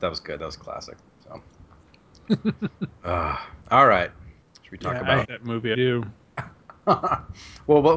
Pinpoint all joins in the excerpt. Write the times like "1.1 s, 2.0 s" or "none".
3.6 s, 5.2 s, 5.7 s